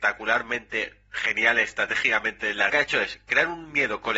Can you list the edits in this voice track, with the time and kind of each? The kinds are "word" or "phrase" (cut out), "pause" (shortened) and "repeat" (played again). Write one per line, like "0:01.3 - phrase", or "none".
0:02.7 - phrase